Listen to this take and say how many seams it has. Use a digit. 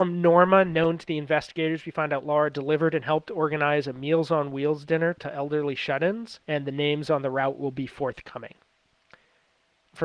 1